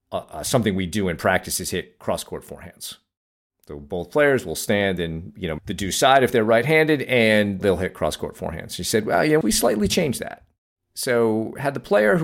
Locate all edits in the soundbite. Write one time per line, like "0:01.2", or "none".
0:05.6
0:07.6
0:09.4